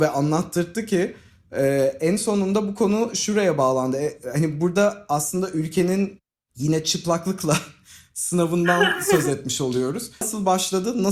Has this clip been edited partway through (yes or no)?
no